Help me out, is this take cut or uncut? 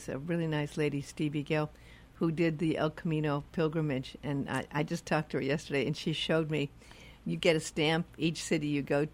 uncut